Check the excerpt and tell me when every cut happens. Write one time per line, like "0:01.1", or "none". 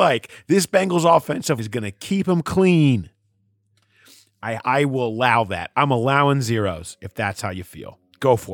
0:01.6
0:04.6